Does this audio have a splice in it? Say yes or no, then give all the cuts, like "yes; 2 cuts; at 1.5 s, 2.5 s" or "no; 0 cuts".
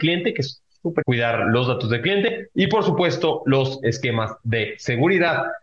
yes; 1 cut; at 1.0 s